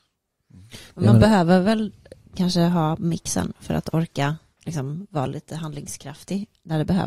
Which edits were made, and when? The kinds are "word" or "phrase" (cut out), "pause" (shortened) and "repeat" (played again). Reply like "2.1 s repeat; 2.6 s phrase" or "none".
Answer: none